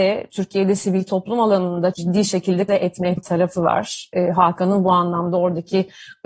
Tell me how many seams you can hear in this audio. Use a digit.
3